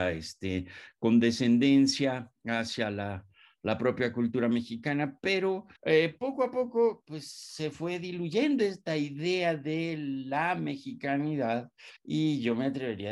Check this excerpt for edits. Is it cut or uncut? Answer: cut